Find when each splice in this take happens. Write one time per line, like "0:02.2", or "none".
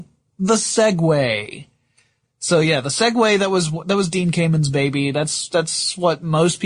none